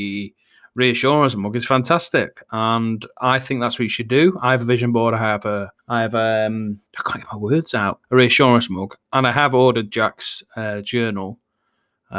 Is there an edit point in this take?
yes; 3 cuts; at 5.8 s, 6.9 s, 8.0 s

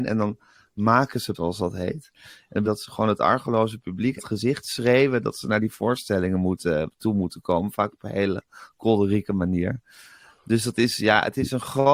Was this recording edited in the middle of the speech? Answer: yes; 3 cuts; at 1.3 s, 2.6 s, 4.2 s

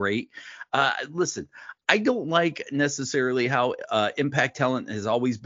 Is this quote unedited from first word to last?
yes; 0 cuts

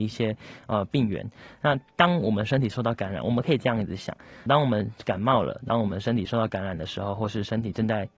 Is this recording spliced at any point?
yes; 1 cut; at 4.5 s

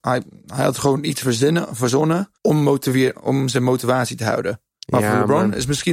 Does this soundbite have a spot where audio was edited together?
yes; 2 cuts; at 2.4 s, 4.8 s

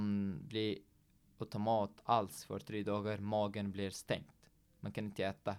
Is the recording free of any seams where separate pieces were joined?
yes; 0 cuts

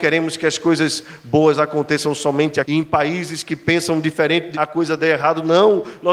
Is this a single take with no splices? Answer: no; 2 cuts; at 2.6 s, 4.5 s

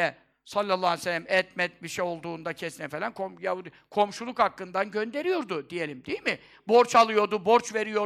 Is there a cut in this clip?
no; 0 cuts

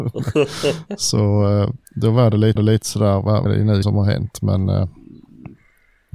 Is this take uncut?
no; 4 cuts; at 1.9 s, 2.6 s, 3.5 s, 3.8 s

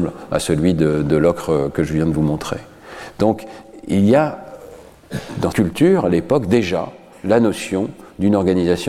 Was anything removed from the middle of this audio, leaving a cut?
yes; 1 cut; at 5.5 s

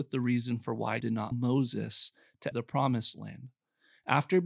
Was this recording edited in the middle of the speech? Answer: yes; 3 cuts; at 1.0 s, 1.3 s, 2.5 s

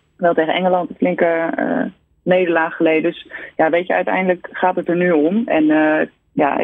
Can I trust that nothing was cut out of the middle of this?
yes; 0 cuts

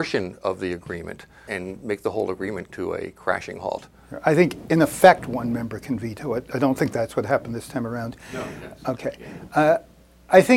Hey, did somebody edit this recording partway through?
yes; 2 cuts; at 1.5 s, 2.7 s

